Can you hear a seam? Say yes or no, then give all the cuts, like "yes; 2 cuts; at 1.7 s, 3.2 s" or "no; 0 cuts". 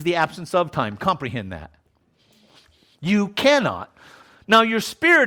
no; 0 cuts